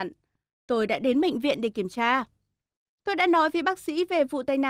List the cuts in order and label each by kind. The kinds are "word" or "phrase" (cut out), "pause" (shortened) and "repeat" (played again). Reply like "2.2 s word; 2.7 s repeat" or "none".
none